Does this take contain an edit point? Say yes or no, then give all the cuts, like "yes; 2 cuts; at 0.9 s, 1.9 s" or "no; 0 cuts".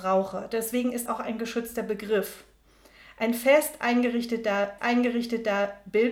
yes; 2 cuts; at 1.1 s, 4.8 s